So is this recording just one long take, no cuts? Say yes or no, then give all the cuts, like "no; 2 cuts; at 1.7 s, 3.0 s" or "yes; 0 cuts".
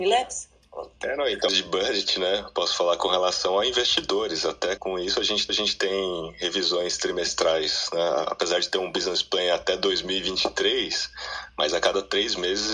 no; 3 cuts; at 1.5 s, 4.8 s, 5.5 s